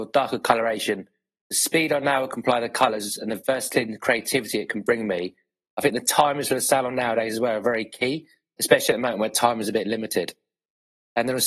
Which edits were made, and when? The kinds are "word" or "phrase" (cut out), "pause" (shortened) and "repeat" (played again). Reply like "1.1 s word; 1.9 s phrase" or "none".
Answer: none